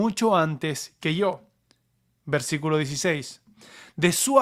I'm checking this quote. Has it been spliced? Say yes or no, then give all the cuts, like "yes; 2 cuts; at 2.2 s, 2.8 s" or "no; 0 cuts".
no; 0 cuts